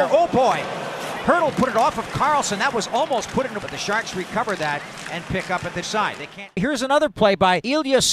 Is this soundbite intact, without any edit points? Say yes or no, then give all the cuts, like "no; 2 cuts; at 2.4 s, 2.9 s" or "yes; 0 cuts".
no; 2 cuts; at 3.6 s, 5.8 s